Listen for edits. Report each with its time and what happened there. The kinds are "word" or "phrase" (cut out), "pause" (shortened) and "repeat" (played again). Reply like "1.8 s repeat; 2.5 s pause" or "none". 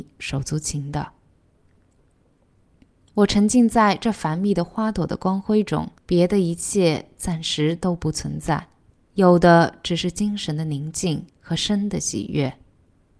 6.0 s pause; 8.9 s pause; 11.3 s pause